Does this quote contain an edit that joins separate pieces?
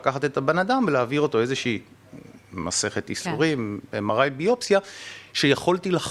no; 0 cuts

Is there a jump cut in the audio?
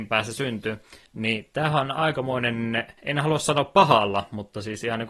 yes; 2 cuts; at 1.0 s, 3.0 s

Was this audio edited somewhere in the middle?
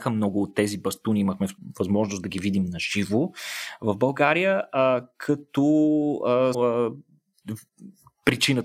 yes; 1 cut; at 6.5 s

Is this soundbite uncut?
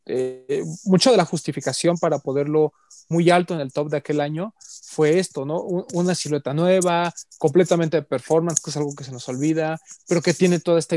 yes; 0 cuts

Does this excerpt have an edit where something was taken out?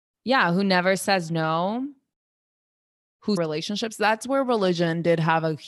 yes; 1 cut; at 3.4 s

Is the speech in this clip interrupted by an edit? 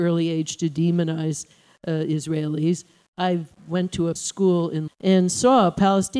yes; 2 cuts; at 4.2 s, 4.9 s

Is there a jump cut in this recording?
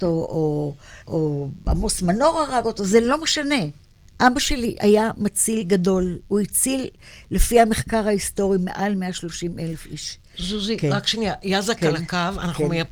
yes; 2 cuts; at 1.0 s, 4.0 s

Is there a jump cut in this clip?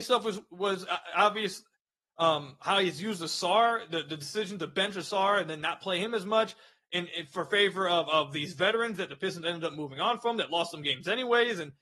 no; 0 cuts

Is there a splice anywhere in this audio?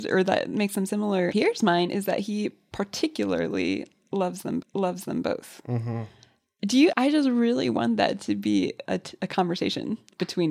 yes; 4 cuts; at 1.3 s, 4.6 s, 6.9 s, 8.8 s

